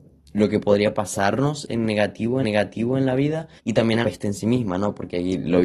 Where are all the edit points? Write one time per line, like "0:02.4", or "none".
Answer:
0:02.4
0:03.6
0:04.0